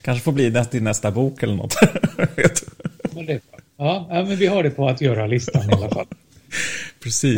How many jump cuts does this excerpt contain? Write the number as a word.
zero